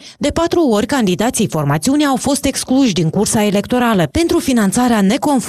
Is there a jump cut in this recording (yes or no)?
no